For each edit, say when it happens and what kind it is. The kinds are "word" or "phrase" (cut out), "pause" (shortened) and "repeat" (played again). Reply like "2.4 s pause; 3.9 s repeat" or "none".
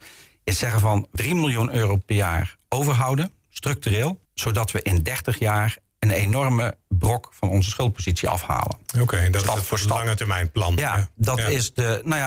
1.2 s word; 4.2 s pause